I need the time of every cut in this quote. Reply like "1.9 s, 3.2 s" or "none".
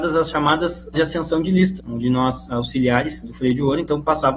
0.9 s, 1.8 s, 2.5 s, 3.2 s